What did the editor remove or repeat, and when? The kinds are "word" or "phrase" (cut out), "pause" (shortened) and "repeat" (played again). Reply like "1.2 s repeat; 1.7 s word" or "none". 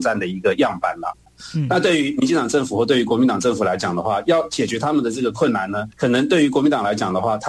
5.9 s pause